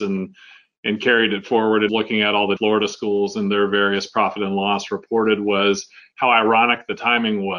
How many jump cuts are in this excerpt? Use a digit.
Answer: 2